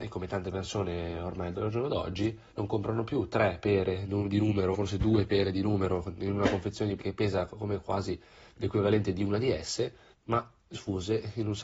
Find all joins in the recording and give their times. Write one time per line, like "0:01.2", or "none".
0:02.5
0:04.7
0:07.0
0:10.1
0:10.7